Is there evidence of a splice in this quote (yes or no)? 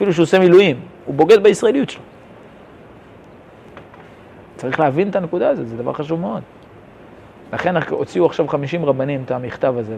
no